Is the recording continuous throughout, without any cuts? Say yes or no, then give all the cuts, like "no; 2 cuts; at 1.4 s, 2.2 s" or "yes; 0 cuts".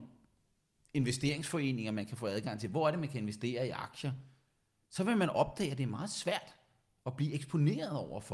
yes; 0 cuts